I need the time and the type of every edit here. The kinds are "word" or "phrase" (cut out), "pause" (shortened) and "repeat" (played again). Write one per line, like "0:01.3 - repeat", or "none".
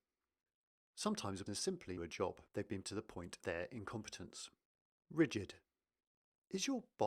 0:01.5 - word
0:02.0 - phrase
0:02.5 - pause
0:02.8 - word
0:03.4 - word
0:04.6 - pause